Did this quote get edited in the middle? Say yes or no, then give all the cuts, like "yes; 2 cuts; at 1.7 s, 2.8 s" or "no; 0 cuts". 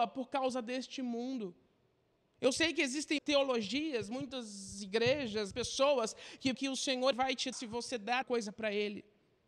yes; 6 cuts; at 3.2 s, 5.5 s, 6.5 s, 7.1 s, 7.5 s, 8.2 s